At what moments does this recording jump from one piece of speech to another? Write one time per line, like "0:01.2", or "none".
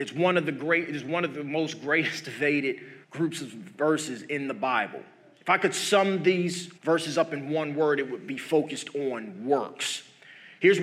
0:03.0
0:06.8